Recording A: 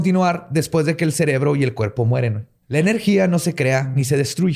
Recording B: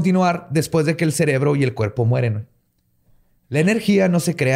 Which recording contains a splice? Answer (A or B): A